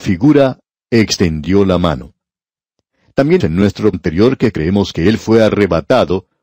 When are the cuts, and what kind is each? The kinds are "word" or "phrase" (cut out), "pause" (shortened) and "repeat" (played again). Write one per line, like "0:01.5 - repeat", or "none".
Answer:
0:03.4 - word
0:03.9 - word